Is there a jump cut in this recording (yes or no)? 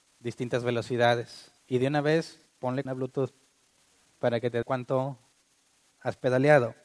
yes